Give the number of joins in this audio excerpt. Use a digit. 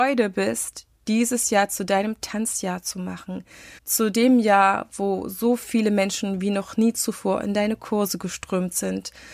1